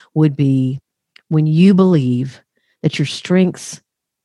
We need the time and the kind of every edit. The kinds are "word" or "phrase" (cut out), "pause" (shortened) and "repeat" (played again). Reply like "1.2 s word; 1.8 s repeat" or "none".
none